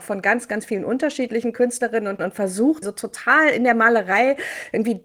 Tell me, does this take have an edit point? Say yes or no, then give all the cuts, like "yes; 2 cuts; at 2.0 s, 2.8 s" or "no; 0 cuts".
yes; 2 cuts; at 2.2 s, 2.8 s